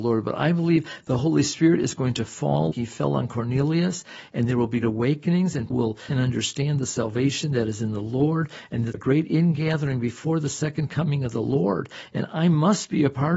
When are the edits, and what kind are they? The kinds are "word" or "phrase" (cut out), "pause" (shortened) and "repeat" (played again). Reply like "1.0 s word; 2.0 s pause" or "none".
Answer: 2.7 s word; 4.8 s word; 5.7 s word; 6.1 s word; 8.9 s phrase